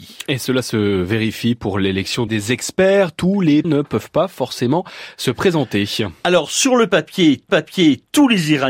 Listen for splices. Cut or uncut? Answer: cut